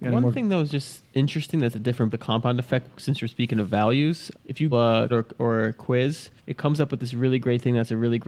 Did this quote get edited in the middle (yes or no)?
yes